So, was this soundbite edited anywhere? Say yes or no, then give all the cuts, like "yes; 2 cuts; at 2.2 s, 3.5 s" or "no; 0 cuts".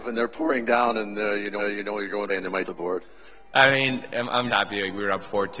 yes; 4 cuts; at 1.6 s, 2.3 s, 2.7 s, 4.5 s